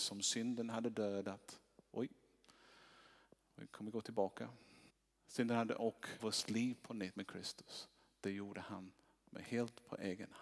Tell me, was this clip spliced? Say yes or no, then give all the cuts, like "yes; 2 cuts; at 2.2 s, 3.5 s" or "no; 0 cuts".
yes; 3 cuts; at 4.9 s, 6.2 s, 7.1 s